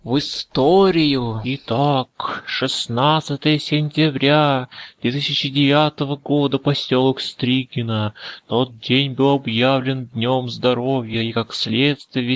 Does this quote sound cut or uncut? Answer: uncut